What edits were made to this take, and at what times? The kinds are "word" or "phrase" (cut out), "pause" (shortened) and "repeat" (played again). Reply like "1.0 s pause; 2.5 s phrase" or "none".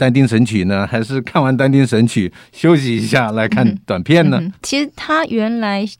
4.6 s pause